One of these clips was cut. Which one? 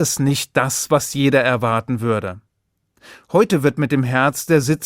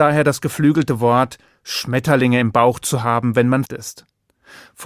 second; 1 cut; at 3.7 s

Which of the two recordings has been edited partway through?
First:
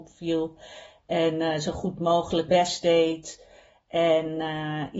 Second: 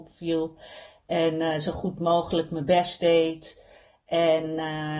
first; 1 cut; at 2.5 s

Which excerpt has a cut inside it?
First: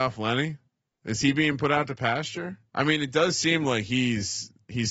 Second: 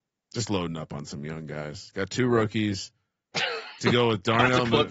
first; 1 cut; at 2.7 s

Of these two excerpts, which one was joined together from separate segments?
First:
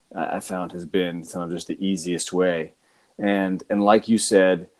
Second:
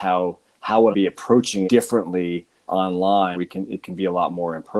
second; 4 cuts; at 0.9 s, 1.6 s, 2.7 s, 3.3 s

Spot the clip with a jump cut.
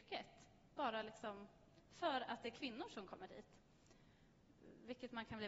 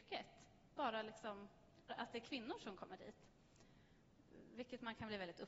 second; 1 cut; at 1.9 s

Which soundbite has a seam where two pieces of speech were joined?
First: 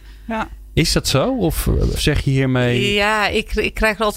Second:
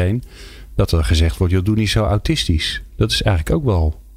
first; 1 cut; at 2.0 s

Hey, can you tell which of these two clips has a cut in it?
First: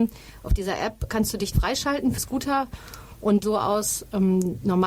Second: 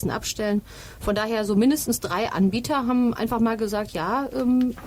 first; 4 cuts; at 1.1 s, 1.5 s, 2.2 s, 3.4 s

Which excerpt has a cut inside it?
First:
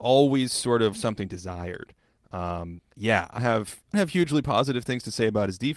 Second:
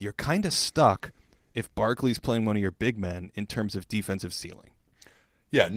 first; 5 cuts; at 0.9 s, 1.3 s, 2.9 s, 3.4 s, 3.9 s

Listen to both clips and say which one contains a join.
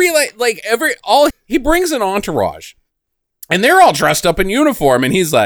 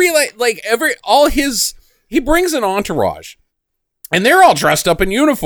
first; 1 cut; at 1.3 s

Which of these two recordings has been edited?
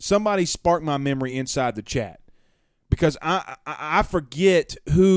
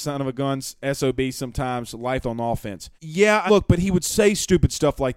second; 3 cuts; at 2.2 s, 3.0 s, 3.5 s

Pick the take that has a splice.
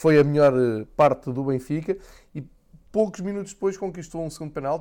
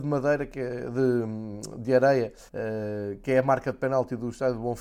second; 1 cut; at 2.5 s

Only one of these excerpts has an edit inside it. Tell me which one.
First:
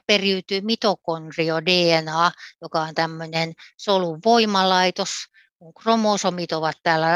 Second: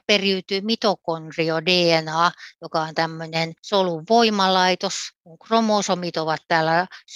second; 2 cuts; at 3.6 s, 5.2 s

